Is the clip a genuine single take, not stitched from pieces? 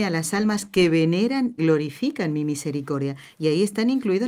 no; 1 cut; at 1.6 s

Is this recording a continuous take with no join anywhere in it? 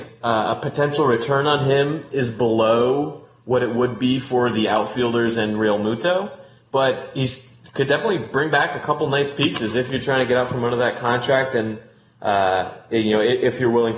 yes; 0 cuts

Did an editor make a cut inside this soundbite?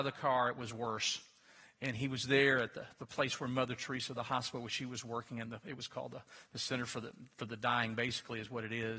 no; 0 cuts

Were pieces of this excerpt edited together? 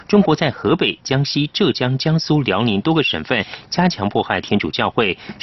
no; 0 cuts

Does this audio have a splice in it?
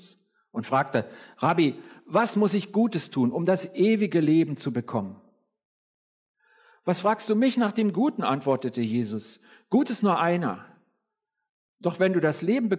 no; 0 cuts

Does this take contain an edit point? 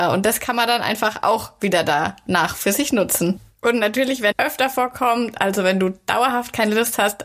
yes; 1 cut; at 4.3 s

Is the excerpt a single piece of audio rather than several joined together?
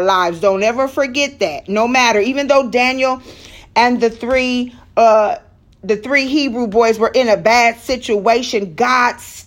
yes; 0 cuts

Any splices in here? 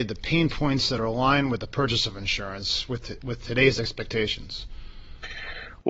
no; 0 cuts

